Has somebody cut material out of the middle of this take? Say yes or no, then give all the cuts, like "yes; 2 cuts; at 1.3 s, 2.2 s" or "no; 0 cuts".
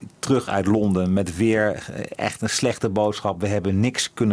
no; 0 cuts